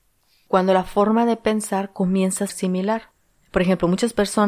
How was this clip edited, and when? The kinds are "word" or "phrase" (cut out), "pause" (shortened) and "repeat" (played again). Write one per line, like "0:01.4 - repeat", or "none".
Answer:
0:02.5 - word